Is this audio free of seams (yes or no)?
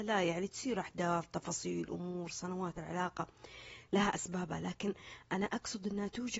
no